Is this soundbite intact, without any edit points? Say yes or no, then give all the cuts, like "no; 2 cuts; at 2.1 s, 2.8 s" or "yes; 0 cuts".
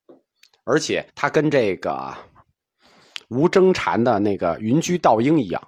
no; 1 cut; at 1.1 s